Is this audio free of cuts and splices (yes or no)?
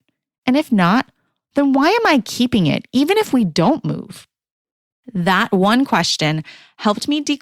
yes